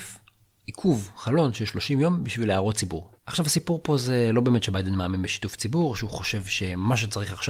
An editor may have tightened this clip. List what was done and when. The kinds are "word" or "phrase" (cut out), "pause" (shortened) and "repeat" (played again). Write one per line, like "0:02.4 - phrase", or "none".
0:03.2 - pause